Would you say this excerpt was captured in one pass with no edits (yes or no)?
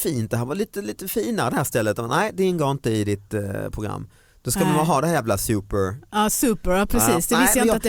yes